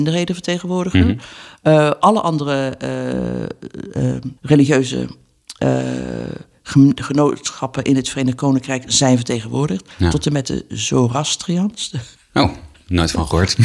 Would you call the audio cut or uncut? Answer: cut